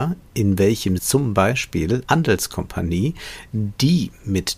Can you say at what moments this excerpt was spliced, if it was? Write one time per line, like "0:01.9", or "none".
0:01.0
0:02.1